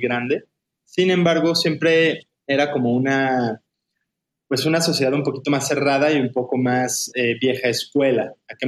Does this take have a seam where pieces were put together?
no; 0 cuts

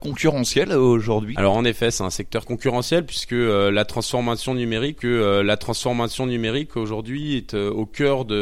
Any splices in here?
yes; 3 cuts; at 1.4 s, 2.4 s, 5.0 s

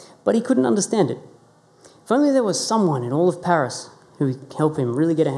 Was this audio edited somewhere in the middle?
no; 0 cuts

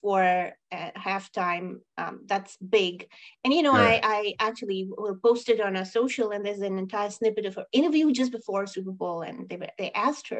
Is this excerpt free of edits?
yes; 0 cuts

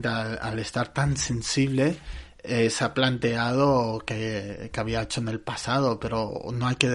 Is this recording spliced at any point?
no; 0 cuts

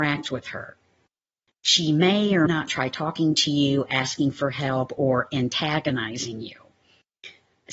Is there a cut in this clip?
yes; 1 cut; at 2.5 s

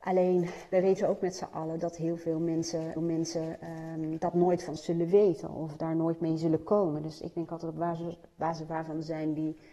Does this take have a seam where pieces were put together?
yes; 3 cuts; at 1.0 s, 3.0 s, 4.8 s

